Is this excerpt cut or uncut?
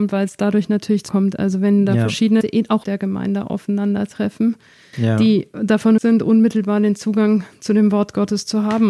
cut